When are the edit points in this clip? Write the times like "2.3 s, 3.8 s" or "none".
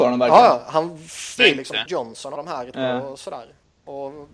1.4 s, 1.9 s, 2.4 s, 2.7 s